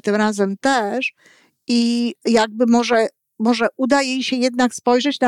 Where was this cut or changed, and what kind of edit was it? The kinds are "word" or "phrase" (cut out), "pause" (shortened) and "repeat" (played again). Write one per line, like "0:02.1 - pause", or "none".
none